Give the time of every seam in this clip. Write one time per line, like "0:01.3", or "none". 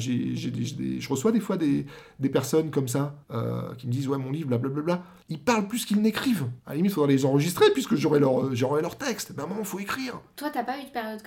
0:03.2
0:05.2
0:06.6

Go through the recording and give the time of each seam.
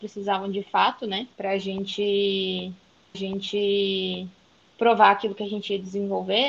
0:01.3
0:03.1

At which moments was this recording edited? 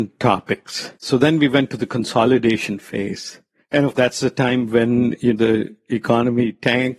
0:01.0
0:03.6
0:03.9
0:05.3

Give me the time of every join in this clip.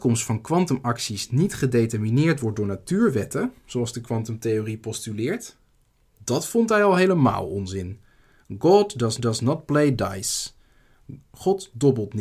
0:09.2

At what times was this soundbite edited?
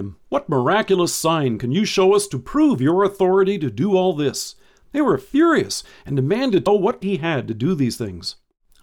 0:06.7
0:07.0

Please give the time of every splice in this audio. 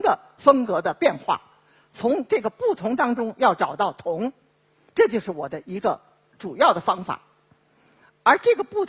none

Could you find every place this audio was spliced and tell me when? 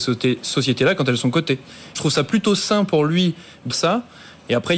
0:01.9
0:03.7

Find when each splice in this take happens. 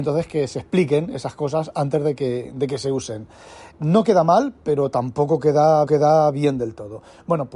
0:03.7
0:05.9

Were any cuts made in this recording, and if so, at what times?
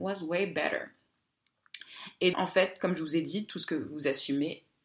0:02.3

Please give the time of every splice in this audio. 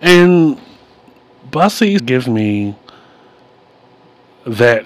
0:02.0

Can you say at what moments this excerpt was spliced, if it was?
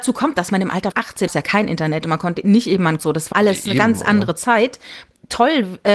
0:00.9
0:01.3
0:03.0
0:03.3

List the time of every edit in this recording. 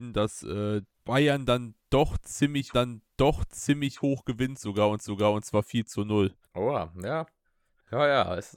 0:00.9
0:02.7
0:05.0
0:06.4
0:07.4

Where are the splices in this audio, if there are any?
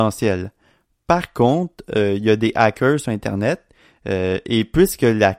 none

